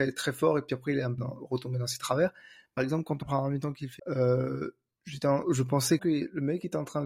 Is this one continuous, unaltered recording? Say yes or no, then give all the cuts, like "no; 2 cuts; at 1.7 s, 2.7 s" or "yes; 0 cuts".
no; 6 cuts; at 1.2 s, 2.8 s, 3.2 s, 4.0 s, 5.4 s, 6.0 s